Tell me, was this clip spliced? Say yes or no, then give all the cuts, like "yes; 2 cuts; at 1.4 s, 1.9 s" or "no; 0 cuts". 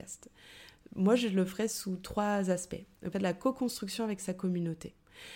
yes; 1 cut; at 3.1 s